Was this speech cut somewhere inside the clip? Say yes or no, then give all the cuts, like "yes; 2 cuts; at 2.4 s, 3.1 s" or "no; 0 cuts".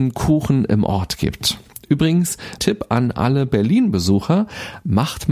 yes; 1 cut; at 2.6 s